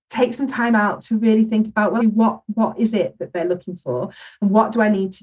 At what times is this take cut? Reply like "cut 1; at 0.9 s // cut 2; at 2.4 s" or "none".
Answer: cut 1; at 2.0 s